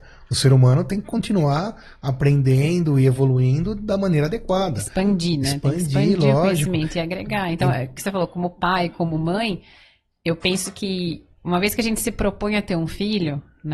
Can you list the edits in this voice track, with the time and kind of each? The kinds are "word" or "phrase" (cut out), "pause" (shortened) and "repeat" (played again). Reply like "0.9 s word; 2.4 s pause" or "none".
none